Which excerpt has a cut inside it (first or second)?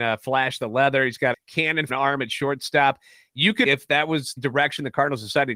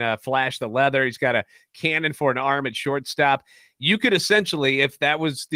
first